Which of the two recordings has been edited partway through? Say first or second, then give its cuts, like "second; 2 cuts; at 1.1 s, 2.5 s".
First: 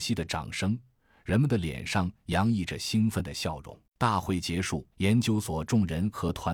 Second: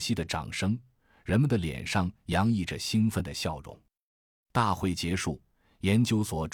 first; 2 cuts; at 3.9 s, 4.9 s